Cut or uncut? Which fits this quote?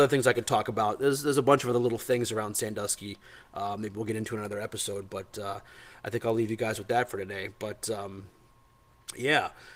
uncut